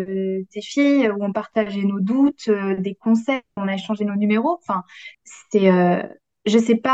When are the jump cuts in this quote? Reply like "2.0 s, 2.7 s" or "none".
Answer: 3.6 s, 5.1 s